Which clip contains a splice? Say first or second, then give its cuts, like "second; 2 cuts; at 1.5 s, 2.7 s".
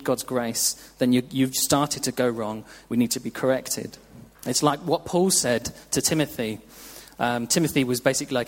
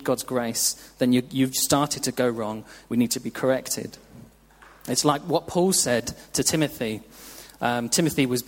first; 1 cut; at 4.3 s